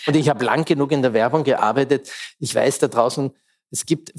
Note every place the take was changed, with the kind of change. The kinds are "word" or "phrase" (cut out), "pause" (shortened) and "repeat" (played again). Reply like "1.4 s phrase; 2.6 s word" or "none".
none